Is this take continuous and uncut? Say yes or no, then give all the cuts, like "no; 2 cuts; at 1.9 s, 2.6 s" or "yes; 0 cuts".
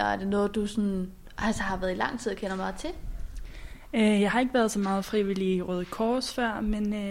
yes; 0 cuts